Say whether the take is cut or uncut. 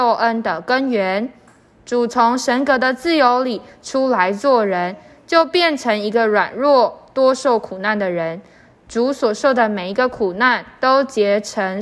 uncut